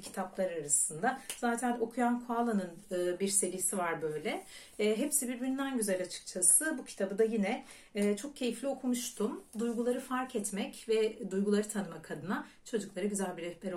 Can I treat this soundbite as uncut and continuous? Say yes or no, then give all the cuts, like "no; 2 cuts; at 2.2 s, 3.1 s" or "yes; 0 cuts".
yes; 0 cuts